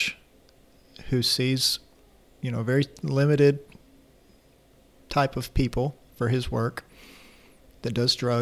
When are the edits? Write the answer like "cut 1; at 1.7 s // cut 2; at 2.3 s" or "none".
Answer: none